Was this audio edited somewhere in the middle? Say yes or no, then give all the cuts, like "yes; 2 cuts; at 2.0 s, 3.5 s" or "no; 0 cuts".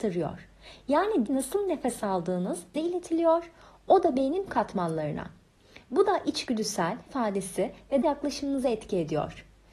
yes; 5 cuts; at 1.3 s, 2.7 s, 4.5 s, 7.1 s, 8.0 s